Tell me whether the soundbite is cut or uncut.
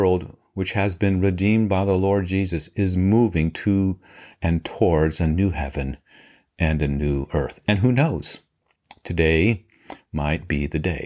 uncut